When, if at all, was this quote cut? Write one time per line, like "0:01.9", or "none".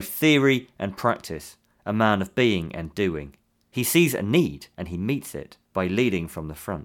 0:04.7
0:05.6